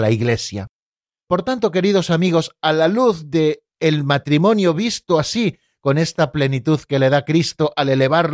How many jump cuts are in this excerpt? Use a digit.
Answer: 0